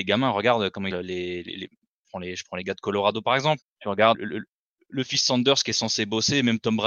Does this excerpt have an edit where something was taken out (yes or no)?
yes